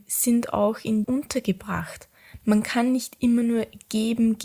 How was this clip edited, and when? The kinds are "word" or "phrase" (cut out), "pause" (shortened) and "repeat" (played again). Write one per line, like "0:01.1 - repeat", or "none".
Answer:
0:01.0 - phrase